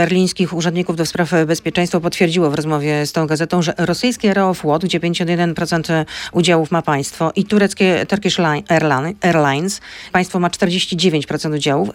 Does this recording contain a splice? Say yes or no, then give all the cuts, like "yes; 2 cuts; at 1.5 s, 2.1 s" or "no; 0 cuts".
yes; 1 cut; at 10.1 s